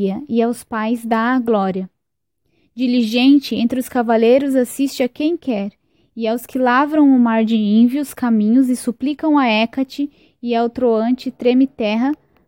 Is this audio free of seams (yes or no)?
yes